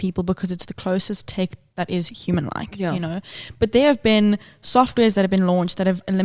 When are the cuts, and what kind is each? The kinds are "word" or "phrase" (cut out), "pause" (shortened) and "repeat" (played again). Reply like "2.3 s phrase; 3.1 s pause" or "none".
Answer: none